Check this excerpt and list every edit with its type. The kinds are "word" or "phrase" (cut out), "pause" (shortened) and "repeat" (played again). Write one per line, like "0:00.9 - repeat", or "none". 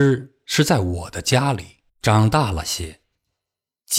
0:01.9 - pause

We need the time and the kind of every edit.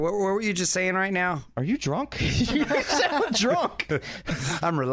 none

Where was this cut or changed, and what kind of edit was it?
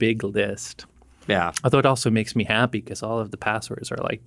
none

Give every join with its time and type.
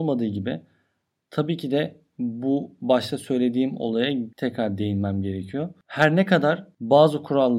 0:04.3 - pause

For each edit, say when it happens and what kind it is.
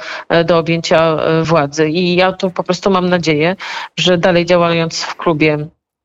none

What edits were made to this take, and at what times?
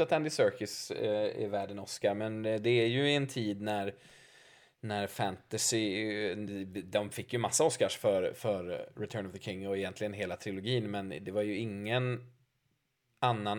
none

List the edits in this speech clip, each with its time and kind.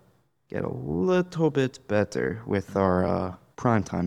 none

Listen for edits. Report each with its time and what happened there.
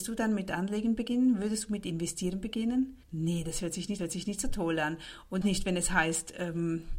0:03.0 - pause
0:04.0 - repeat
0:05.4 - word

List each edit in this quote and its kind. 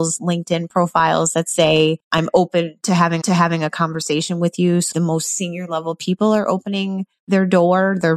0:02.0 - pause
0:03.2 - repeat
0:04.9 - word

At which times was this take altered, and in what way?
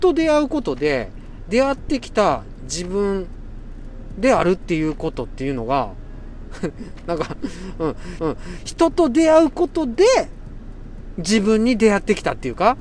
0:08.2 - repeat

